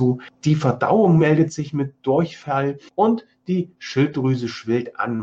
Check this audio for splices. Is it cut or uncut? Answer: uncut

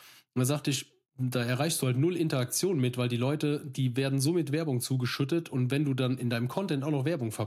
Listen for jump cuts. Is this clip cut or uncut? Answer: uncut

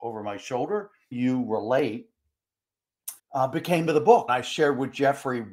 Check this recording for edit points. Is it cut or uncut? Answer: cut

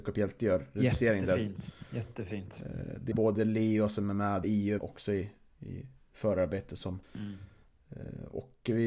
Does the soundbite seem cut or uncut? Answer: cut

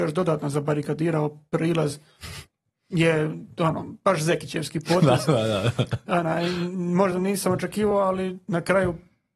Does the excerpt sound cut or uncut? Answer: uncut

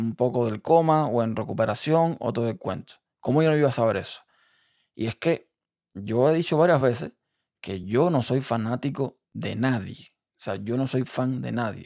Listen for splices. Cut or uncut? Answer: uncut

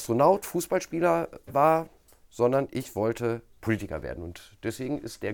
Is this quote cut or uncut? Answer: uncut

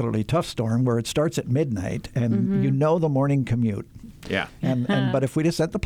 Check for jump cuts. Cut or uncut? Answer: uncut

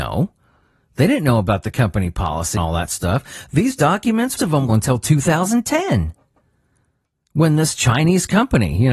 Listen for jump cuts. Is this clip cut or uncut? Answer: cut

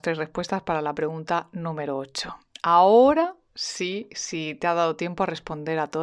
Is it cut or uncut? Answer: uncut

